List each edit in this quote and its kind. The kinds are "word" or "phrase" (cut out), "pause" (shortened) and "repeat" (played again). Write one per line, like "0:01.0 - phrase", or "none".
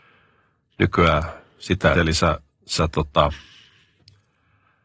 0:01.9 - phrase